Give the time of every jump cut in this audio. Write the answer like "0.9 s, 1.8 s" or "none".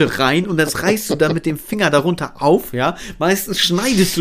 none